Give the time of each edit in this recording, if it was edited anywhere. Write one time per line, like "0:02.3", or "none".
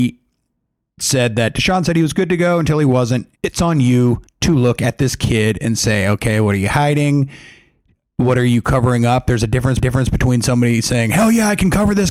0:03.4
0:04.3
0:09.8